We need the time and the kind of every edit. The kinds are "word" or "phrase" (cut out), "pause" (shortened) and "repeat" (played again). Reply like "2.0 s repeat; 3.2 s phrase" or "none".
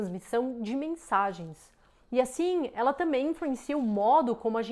none